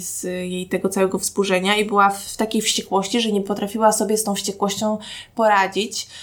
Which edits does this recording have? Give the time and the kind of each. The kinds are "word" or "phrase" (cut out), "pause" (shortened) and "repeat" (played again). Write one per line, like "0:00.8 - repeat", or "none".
none